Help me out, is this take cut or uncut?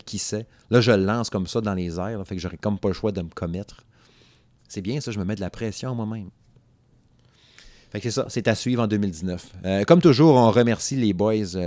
uncut